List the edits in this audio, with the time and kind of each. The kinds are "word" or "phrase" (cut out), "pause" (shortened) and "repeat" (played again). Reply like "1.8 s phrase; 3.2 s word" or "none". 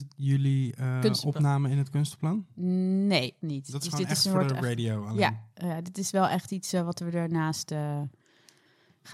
3.4 s word; 5.5 s pause